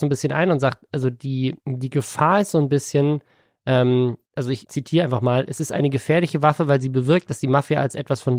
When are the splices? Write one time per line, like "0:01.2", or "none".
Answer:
0:01.6
0:04.3
0:04.6